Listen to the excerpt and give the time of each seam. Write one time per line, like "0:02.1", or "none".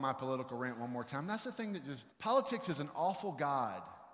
0:02.1